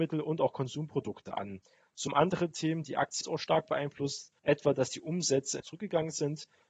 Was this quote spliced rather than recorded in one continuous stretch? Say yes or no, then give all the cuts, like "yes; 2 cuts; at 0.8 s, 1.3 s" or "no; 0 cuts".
yes; 4 cuts; at 2.1 s, 3.2 s, 4.4 s, 5.6 s